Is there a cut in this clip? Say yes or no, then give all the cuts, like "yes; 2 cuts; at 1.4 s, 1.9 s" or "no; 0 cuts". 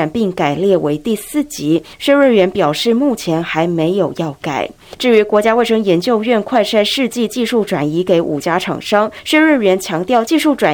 no; 0 cuts